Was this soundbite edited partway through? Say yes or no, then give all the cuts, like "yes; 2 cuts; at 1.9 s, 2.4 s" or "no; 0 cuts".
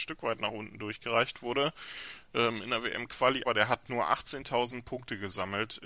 yes; 1 cut; at 3.4 s